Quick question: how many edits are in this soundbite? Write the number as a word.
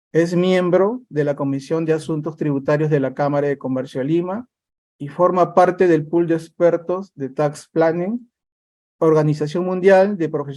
zero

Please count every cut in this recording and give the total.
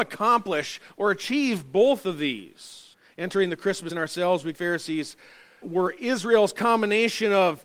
four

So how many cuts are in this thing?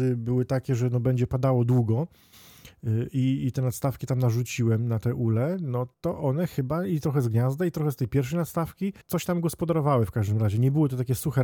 two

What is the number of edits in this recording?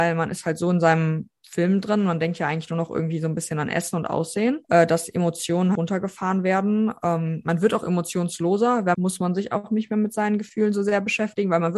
three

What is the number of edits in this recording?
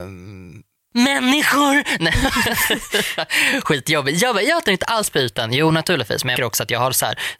two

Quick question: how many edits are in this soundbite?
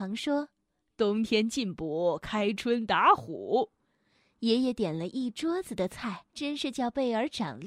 one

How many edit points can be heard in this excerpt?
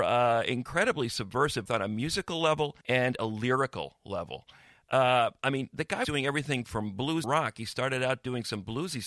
four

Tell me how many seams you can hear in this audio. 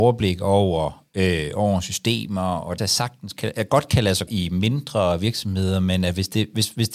two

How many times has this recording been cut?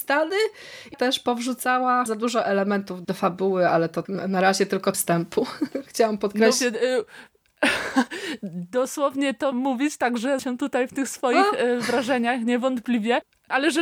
eight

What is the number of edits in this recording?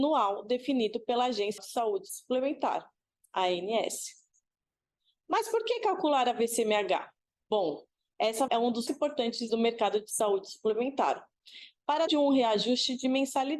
five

